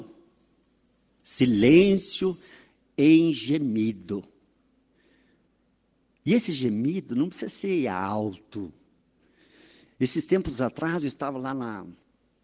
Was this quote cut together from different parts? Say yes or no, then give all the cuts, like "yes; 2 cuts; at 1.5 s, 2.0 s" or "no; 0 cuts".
no; 0 cuts